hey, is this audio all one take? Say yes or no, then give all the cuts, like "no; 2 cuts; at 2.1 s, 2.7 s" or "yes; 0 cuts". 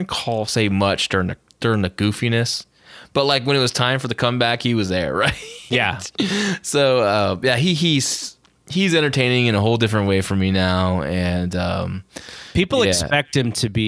yes; 0 cuts